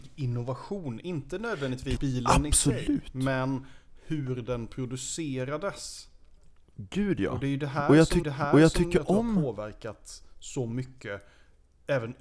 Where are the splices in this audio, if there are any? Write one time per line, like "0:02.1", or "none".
0:02.0
0:08.2